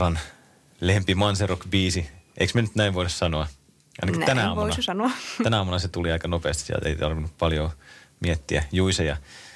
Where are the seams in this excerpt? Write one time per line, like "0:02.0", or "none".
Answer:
none